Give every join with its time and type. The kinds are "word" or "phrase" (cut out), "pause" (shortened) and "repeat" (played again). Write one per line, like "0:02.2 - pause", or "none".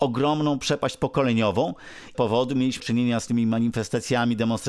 0:02.1 - phrase
0:02.8 - word